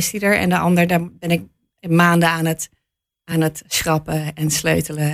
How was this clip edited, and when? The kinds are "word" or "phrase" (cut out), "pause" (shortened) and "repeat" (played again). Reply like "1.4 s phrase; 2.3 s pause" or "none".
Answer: none